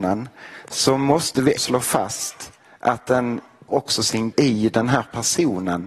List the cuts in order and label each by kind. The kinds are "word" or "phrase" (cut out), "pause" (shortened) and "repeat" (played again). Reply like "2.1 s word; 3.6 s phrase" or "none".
1.6 s word; 3.7 s word; 4.3 s word